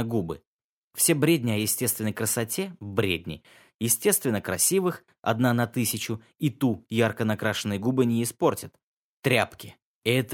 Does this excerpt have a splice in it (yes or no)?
no